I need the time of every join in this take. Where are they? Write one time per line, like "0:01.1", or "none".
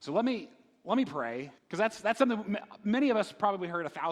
0:01.6